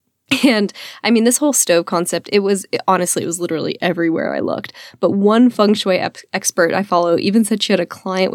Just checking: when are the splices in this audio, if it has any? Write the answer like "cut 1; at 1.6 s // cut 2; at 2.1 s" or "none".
none